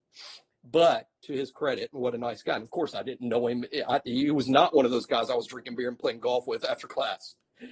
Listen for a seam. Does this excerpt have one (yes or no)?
yes